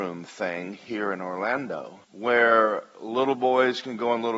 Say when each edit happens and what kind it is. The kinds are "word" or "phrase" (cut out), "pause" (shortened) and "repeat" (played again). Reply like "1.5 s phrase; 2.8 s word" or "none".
2.0 s pause